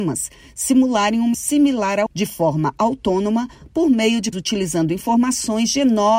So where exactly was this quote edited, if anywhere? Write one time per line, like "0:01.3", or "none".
0:01.3
0:02.1
0:04.3